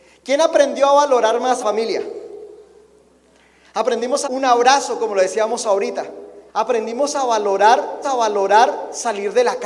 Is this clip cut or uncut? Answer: cut